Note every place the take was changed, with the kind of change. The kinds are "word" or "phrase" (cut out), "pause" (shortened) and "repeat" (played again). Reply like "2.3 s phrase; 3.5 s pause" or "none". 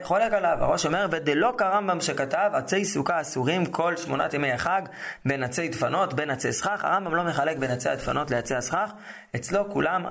none